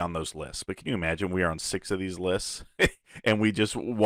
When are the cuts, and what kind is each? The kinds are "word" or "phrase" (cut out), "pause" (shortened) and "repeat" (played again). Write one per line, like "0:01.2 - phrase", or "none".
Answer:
none